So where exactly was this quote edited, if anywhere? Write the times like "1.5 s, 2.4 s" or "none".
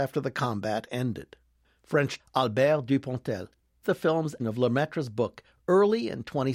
2.2 s, 3.8 s, 4.4 s